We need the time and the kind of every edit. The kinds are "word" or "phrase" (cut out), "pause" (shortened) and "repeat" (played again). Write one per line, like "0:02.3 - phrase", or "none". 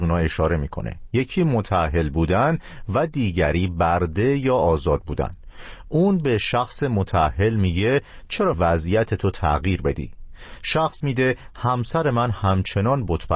0:08.5 - word
0:11.0 - word